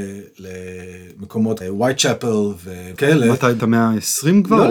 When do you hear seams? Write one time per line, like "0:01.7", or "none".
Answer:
0:01.6
0:03.0
0:03.6